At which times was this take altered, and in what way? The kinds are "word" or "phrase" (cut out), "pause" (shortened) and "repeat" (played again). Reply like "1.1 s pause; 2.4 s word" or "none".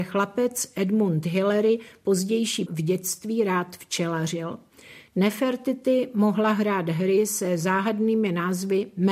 2.7 s phrase